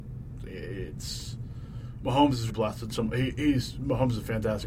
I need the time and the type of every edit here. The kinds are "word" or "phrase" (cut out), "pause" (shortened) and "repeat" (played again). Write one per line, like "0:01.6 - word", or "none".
0:02.5 - word